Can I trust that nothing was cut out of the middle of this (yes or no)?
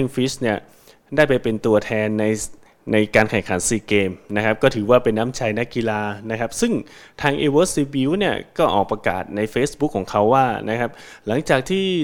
yes